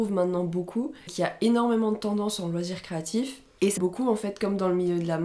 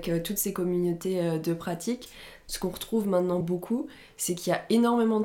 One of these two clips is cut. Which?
first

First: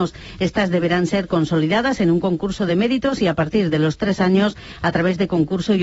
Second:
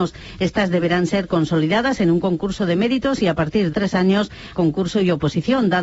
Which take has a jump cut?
second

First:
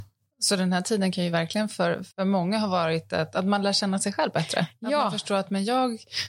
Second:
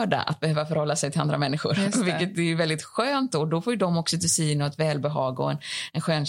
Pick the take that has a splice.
first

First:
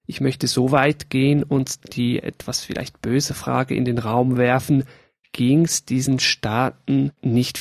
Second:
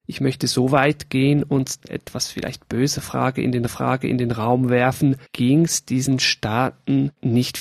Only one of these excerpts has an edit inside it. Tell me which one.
second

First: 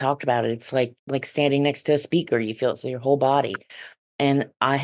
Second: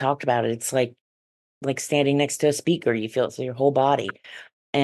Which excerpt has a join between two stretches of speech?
first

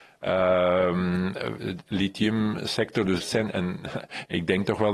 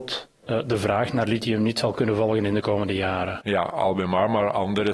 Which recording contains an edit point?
first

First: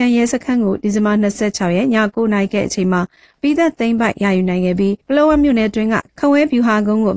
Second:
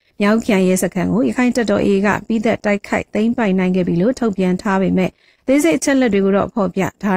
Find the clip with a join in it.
first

